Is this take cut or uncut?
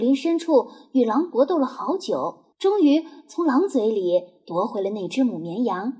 cut